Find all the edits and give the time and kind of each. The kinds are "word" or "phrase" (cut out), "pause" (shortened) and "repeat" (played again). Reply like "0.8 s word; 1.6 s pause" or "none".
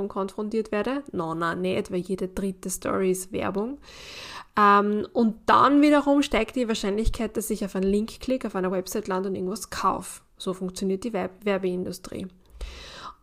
none